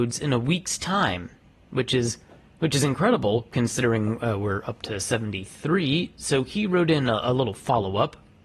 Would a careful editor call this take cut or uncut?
uncut